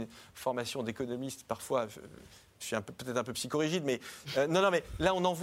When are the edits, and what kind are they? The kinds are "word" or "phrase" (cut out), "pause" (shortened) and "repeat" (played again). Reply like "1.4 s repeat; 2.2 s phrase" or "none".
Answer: none